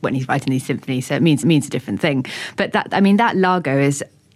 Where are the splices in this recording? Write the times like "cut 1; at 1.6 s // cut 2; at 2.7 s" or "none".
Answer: cut 1; at 1.4 s